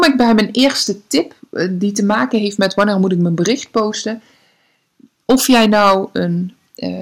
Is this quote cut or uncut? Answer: uncut